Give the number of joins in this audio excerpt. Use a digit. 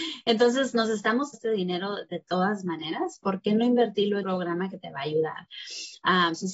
2